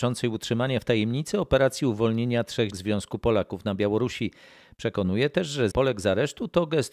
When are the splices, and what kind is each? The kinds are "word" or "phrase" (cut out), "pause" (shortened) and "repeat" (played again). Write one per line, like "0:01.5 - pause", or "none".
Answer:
0:02.7 - word
0:05.7 - word